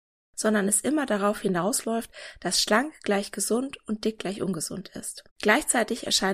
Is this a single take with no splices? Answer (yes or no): no